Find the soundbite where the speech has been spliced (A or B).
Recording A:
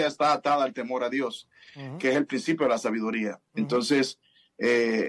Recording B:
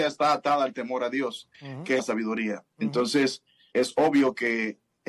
B